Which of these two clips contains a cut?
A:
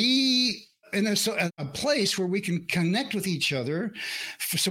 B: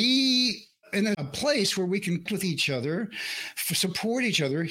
B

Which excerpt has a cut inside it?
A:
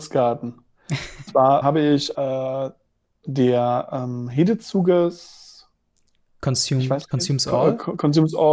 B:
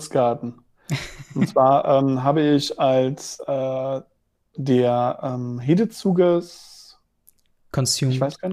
A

